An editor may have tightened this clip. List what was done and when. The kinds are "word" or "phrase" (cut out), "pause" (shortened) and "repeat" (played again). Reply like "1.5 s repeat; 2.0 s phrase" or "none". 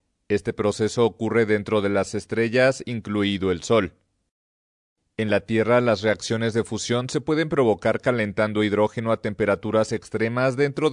none